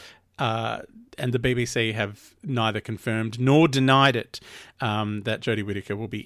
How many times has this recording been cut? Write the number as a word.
zero